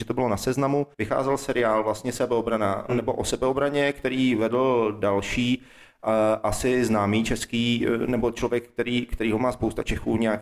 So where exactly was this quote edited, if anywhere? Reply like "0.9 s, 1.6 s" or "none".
0.9 s